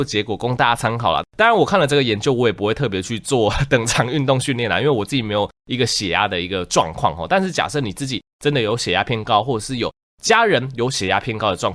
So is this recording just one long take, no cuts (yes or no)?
yes